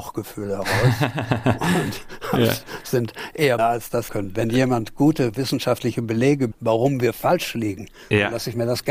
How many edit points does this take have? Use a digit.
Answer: 3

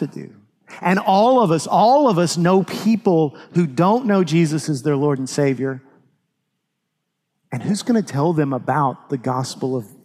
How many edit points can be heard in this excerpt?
0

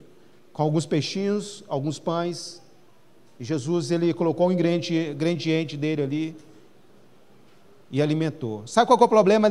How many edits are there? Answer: 0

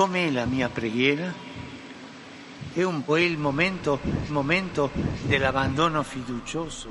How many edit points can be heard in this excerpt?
2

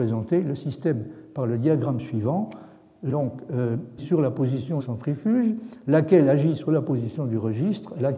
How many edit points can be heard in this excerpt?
3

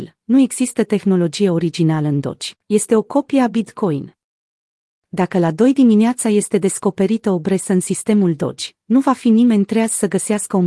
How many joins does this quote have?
1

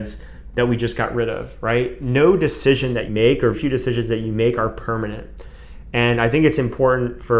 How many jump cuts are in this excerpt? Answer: 2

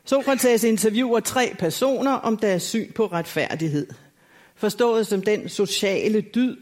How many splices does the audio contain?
0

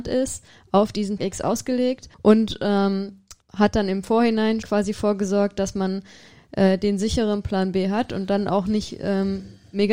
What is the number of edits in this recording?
4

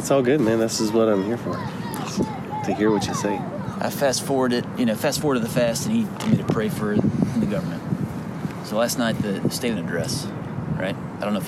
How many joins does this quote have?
4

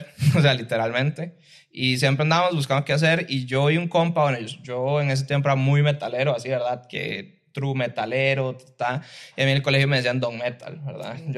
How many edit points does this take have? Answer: 0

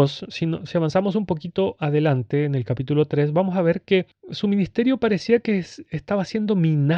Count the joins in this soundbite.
0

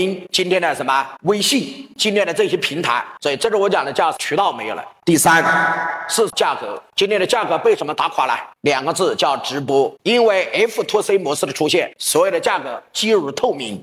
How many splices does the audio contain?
0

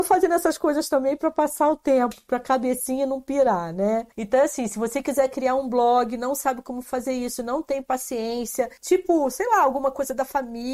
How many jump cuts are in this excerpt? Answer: 2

